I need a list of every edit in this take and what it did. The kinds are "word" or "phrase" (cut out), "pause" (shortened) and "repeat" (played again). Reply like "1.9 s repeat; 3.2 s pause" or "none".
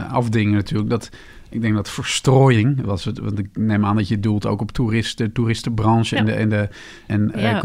2.8 s word